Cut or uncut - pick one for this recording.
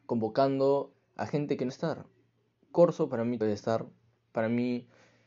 cut